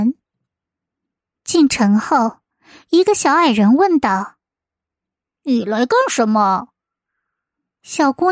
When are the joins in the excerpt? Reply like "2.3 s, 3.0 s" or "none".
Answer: none